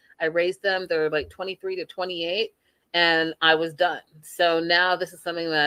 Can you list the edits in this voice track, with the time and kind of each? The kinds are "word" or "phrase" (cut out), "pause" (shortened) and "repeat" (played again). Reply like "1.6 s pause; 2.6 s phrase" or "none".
none